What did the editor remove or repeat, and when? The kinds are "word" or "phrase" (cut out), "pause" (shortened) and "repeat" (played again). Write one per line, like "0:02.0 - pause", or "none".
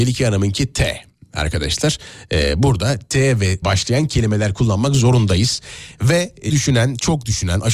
0:03.6 - phrase
0:06.5 - word